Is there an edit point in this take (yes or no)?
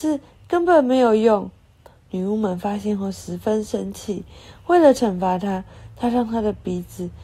no